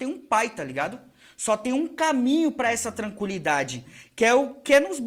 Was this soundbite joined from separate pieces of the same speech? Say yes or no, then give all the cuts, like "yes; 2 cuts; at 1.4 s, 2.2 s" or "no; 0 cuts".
no; 0 cuts